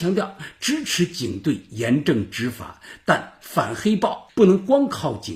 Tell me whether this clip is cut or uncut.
uncut